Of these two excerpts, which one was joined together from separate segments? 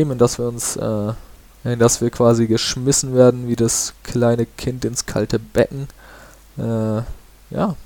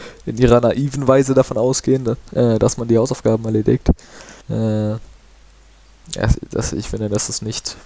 second; 1 cut; at 4.4 s

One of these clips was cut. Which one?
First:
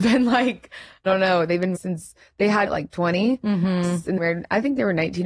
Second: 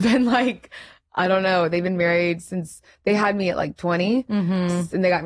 first; 4 cuts; at 1.1 s, 1.7 s, 2.7 s, 4.2 s

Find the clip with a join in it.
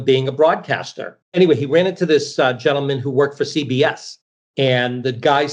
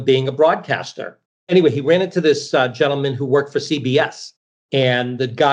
first; 1 cut; at 1.2 s

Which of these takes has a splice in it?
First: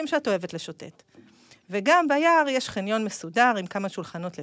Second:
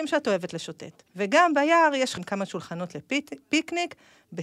second; 2 cuts; at 1.1 s, 2.2 s

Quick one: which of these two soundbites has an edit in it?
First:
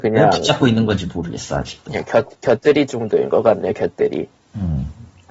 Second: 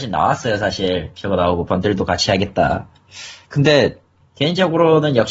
second; 2 cuts; at 1.7 s, 3.4 s

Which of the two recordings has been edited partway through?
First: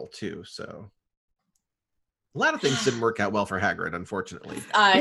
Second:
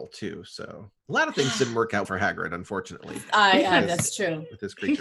second; 2 cuts; at 1.0 s, 2.0 s

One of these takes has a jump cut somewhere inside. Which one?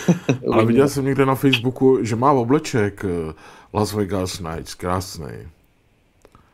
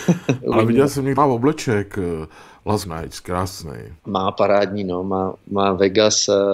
second; 3 cuts; at 1.2 s, 2.8 s, 4.0 s

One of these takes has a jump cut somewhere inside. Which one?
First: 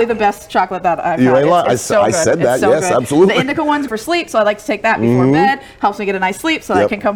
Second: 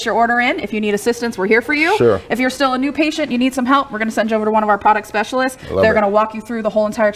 first; 1 cut; at 3.9 s

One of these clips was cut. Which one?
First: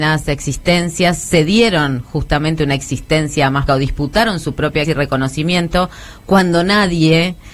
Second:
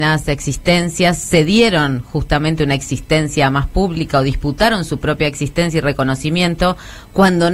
first; 2 cuts; at 3.7 s, 4.8 s

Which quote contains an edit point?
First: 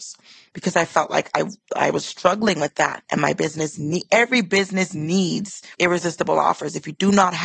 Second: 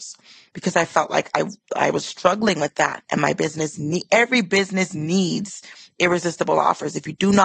first; 1 cut; at 5.7 s

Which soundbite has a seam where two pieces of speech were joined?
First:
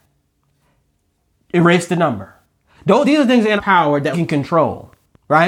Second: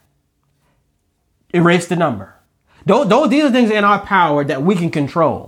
first; 3 cuts; at 3.0 s, 3.6 s, 4.1 s

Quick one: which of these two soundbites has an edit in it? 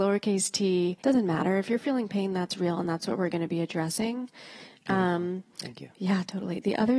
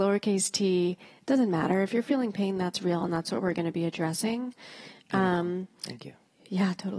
first; 2 cuts; at 1.0 s, 5.9 s

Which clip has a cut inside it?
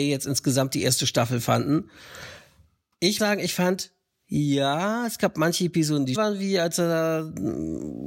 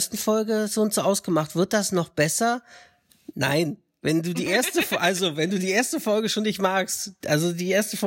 first; 2 cuts; at 3.2 s, 6.1 s

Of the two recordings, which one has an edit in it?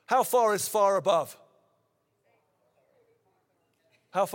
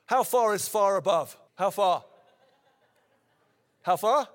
second; 1 cut; at 1.5 s

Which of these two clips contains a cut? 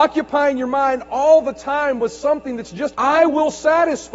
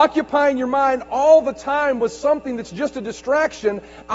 first; 1 cut; at 2.9 s

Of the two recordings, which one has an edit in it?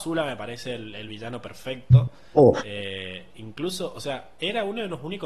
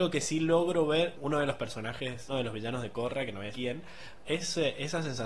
second; 4 cuts; at 1.1 s, 2.3 s, 3.5 s, 4.2 s

